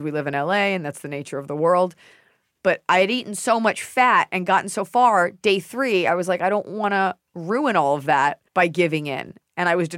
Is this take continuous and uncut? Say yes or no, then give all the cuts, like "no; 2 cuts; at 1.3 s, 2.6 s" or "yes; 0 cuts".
no; 1 cut; at 8.5 s